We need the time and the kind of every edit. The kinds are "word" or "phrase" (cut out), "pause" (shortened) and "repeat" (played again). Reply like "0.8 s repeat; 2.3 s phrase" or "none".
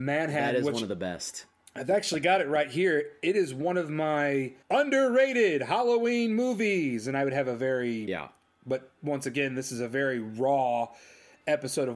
4.6 s pause